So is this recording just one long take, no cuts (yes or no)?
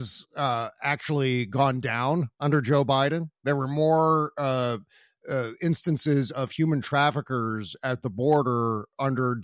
yes